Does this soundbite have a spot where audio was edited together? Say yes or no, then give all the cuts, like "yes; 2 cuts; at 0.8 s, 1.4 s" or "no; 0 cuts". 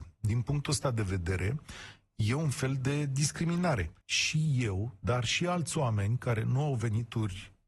yes; 1 cut; at 4.0 s